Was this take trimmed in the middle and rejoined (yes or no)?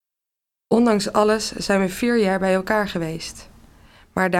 no